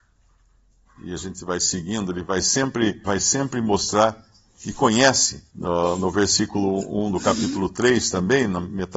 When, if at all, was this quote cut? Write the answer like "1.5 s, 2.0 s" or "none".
3.0 s, 5.5 s